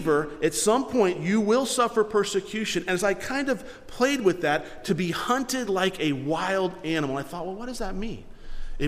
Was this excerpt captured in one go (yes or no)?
yes